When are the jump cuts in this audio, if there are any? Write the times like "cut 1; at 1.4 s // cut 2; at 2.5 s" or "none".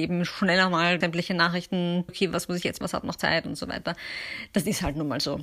cut 1; at 1.0 s // cut 2; at 2.1 s // cut 3; at 2.8 s